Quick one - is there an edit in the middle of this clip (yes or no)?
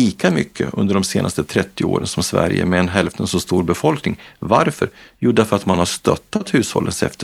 no